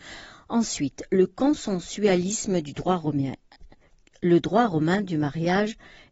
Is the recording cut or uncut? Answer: uncut